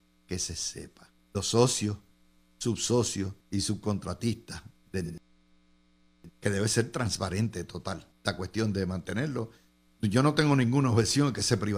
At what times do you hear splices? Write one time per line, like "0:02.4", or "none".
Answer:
0:01.2
0:03.4
0:06.3
0:08.1